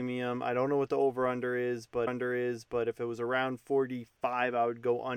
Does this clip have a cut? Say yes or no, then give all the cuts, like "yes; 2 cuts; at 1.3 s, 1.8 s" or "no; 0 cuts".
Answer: yes; 1 cut; at 2.1 s